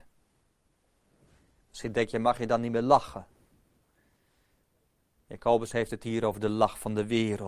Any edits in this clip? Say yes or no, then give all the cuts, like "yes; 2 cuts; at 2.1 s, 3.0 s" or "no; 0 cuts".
no; 0 cuts